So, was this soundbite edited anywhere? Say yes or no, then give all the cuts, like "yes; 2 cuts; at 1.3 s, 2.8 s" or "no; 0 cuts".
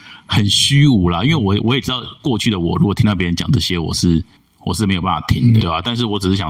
yes; 2 cuts; at 4.4 s, 5.6 s